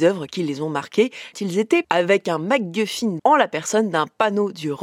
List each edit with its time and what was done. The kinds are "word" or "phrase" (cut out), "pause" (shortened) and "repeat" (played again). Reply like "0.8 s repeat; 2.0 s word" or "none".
1.3 s word; 1.8 s word; 3.2 s word